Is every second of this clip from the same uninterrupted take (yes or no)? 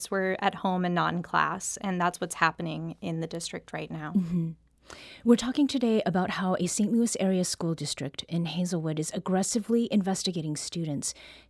yes